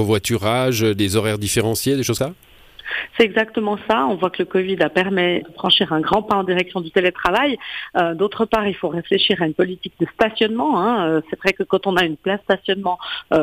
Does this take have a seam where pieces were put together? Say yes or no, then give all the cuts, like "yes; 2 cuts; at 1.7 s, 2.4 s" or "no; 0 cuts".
yes; 3 cuts; at 2.2 s, 5.4 s, 12.4 s